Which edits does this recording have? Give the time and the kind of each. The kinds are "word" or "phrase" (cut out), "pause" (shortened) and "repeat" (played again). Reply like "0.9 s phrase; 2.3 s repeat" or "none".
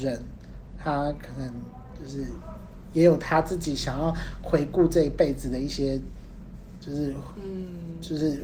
none